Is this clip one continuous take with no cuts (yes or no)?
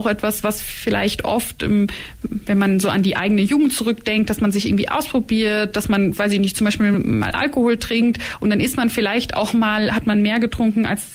yes